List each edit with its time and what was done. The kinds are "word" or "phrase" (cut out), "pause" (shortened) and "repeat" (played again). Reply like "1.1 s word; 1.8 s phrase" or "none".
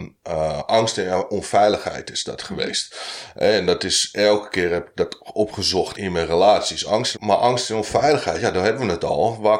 5.9 s word; 7.1 s phrase